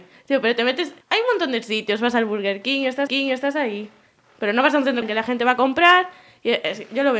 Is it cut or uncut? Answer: cut